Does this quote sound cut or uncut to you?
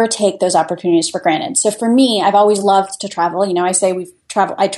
uncut